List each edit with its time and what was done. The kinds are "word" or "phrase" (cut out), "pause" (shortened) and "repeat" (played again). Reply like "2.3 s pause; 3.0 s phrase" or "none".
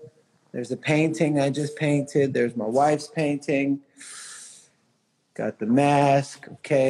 none